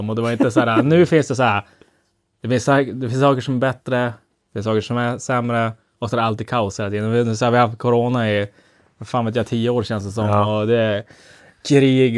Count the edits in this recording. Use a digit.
0